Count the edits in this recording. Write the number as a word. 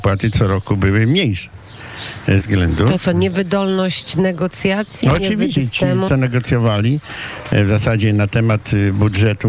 three